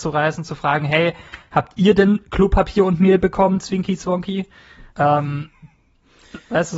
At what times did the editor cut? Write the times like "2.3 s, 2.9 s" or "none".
4.9 s